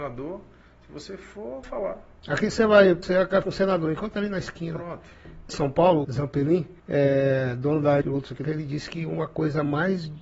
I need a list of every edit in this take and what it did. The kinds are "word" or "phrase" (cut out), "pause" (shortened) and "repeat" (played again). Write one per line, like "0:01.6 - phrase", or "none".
0:01.6 - phrase
0:03.0 - phrase
0:03.4 - word
0:05.5 - phrase
0:06.0 - word
0:06.8 - pause
0:08.0 - phrase
0:08.4 - word